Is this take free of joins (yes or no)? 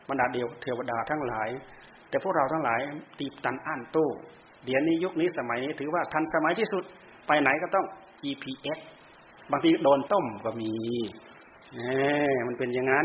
no